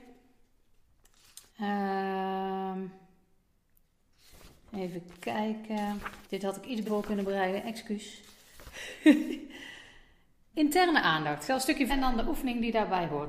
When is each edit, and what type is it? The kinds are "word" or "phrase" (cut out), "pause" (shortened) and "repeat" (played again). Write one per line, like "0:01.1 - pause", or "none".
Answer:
0:01.5 - pause
0:06.2 - pause
0:06.8 - word
0:10.5 - word
0:11.9 - word